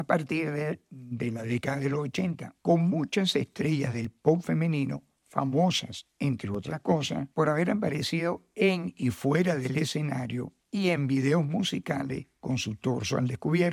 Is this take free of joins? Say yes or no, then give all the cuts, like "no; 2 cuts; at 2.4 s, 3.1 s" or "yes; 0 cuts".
no; 3 cuts; at 2.6 s, 7.3 s, 10.6 s